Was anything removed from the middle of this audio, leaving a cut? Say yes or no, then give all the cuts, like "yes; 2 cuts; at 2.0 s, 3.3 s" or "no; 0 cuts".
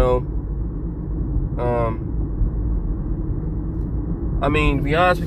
no; 0 cuts